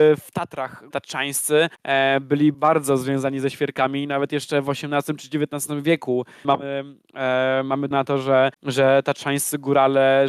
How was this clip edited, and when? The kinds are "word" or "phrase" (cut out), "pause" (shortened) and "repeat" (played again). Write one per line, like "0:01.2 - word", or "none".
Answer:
0:00.9 - word
0:01.7 - pause
0:02.5 - word
0:06.4 - word
0:07.9 - word
0:08.5 - pause